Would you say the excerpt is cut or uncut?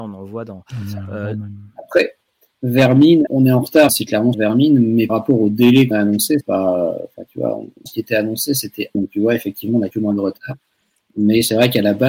cut